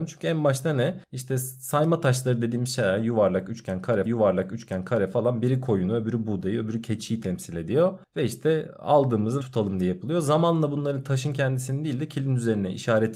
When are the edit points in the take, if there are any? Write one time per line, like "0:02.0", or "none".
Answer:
0:04.0
0:09.4